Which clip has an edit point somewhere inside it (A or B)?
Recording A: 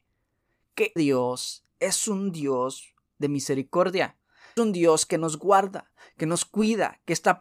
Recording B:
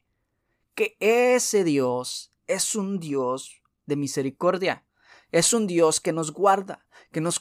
A